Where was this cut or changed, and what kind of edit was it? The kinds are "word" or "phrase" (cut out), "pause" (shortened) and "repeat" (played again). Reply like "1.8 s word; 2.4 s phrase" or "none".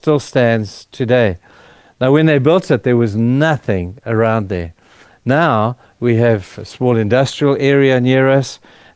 none